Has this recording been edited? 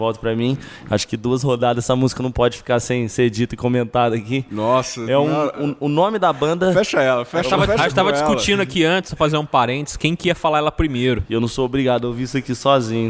no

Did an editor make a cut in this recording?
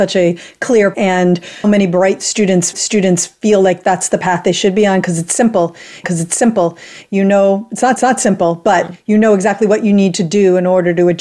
yes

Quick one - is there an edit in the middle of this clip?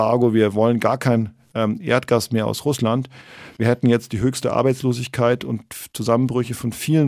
no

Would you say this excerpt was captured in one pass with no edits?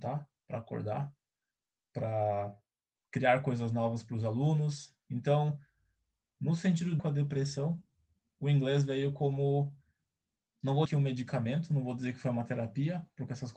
no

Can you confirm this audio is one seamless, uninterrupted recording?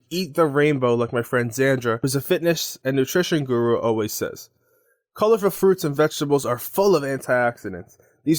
yes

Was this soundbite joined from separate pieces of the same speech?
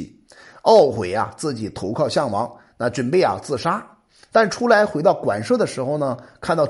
no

